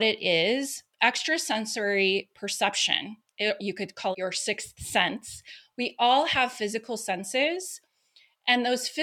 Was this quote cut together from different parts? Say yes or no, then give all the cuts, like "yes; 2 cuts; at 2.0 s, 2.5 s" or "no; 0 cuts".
yes; 2 cuts; at 3.6 s, 4.1 s